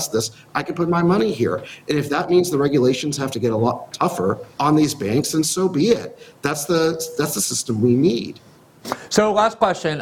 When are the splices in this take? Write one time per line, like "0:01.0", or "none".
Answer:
0:04.5